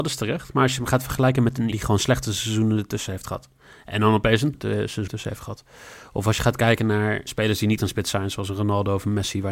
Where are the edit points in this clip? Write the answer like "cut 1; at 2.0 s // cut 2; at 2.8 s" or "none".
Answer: cut 1; at 1.7 s // cut 2; at 4.5 s // cut 3; at 5.1 s // cut 4; at 7.3 s // cut 5; at 7.8 s